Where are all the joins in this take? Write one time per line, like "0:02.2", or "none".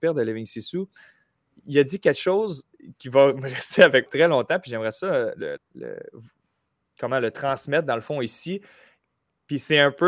0:02.9
0:04.1
0:05.6